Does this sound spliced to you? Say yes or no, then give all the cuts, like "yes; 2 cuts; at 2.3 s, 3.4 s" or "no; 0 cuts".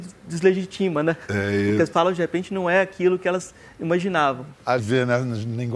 yes; 2 cuts; at 1.9 s, 4.8 s